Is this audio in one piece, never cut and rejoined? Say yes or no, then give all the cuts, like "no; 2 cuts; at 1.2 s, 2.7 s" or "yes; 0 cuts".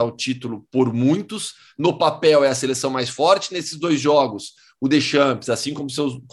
yes; 0 cuts